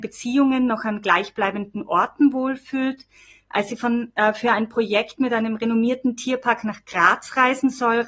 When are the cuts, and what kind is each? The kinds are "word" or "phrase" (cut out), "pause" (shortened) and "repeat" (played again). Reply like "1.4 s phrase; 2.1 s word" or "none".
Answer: none